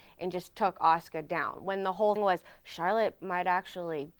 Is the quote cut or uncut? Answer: cut